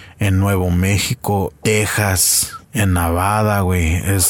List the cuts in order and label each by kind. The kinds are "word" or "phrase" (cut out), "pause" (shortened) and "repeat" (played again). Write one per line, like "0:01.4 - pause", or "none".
0:01.6 - word
0:02.6 - pause

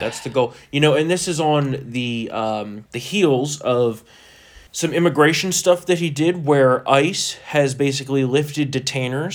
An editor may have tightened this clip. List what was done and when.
0:04.7 - pause

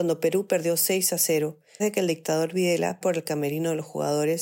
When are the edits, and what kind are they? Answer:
0:01.8 - word
0:03.0 - word

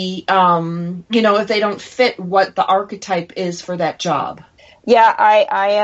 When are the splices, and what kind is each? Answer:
0:04.6 - pause

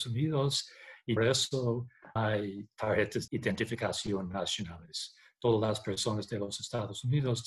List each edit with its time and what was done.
0:01.2 - word
0:02.2 - word
0:03.3 - word

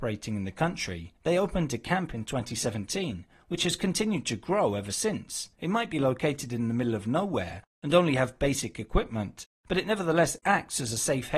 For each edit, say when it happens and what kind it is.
0:01.2 - pause
0:05.5 - pause

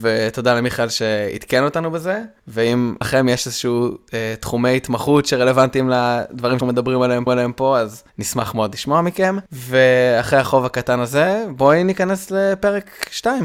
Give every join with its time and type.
0:03.0 - word
0:06.6 - word
0:07.3 - repeat
0:08.1 - pause
0:09.5 - pause

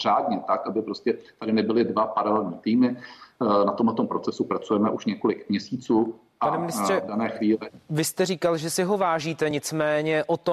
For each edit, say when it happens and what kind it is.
none

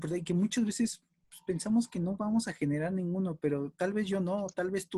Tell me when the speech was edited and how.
none

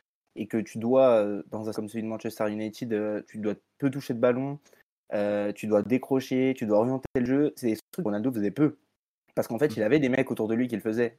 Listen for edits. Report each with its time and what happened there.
0:01.7 - word

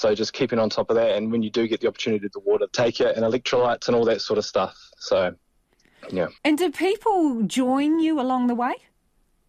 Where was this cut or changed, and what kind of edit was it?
0:02.3 - word
0:02.7 - word
0:06.4 - pause

